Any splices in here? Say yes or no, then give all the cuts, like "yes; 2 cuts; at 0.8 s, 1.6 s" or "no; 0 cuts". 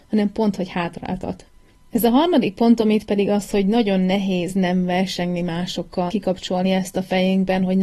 yes; 1 cut; at 6.1 s